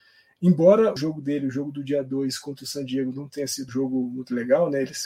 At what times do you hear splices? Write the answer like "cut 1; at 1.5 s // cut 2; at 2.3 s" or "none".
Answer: cut 1; at 1.0 s // cut 2; at 3.7 s

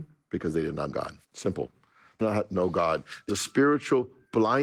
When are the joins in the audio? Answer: cut 1; at 0.9 s // cut 2; at 1.2 s // cut 3; at 2.2 s // cut 4; at 3.3 s

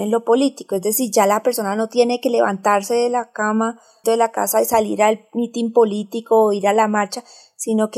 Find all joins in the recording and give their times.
cut 1; at 4.0 s

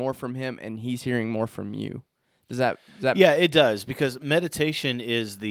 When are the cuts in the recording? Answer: none

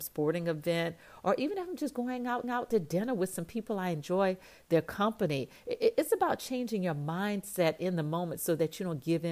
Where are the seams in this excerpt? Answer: cut 1; at 2.4 s

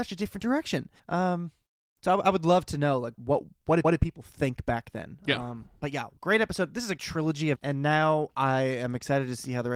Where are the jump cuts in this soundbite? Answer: cut 1; at 1.0 s // cut 2; at 3.1 s // cut 3; at 3.8 s // cut 4; at 6.2 s // cut 5; at 7.0 s // cut 6; at 7.6 s

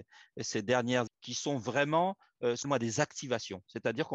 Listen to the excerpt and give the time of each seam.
cut 1; at 1.1 s // cut 2; at 2.6 s

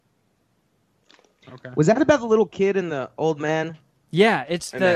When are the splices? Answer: none

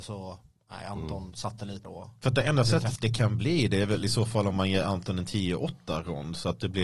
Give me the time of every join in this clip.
cut 1; at 1.8 s // cut 2; at 3.0 s

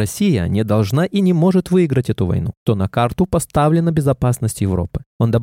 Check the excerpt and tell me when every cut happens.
cut 1; at 2.7 s

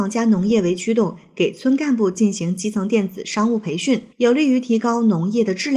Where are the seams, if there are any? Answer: cut 1; at 4.1 s

